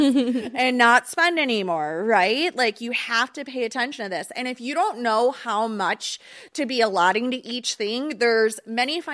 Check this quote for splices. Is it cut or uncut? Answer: uncut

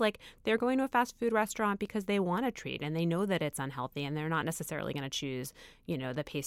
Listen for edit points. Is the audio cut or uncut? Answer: uncut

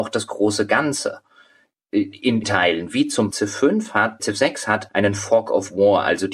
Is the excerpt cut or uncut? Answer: cut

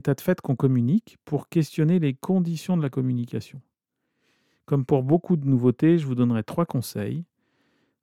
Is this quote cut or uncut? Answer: uncut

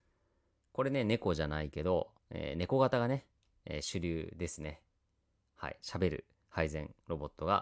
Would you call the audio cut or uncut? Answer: cut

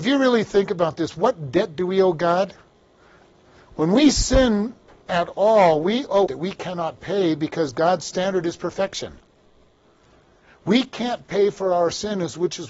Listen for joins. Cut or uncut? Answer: cut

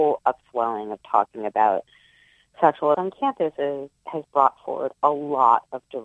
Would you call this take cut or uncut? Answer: cut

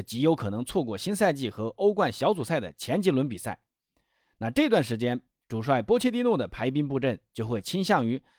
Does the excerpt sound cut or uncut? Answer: uncut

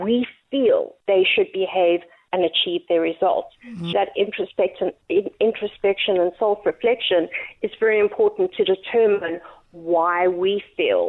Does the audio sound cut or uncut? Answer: cut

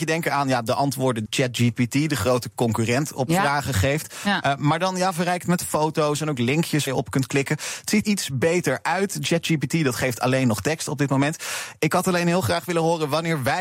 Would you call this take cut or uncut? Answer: cut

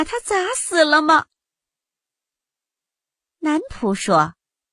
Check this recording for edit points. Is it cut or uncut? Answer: uncut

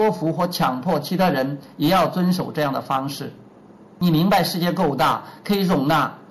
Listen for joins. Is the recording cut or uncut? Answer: uncut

